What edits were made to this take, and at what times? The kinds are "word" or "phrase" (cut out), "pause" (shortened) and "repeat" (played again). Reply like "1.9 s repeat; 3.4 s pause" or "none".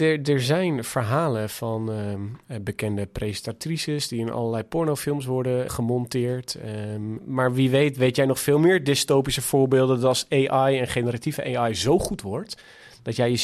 5.7 s word; 7.2 s word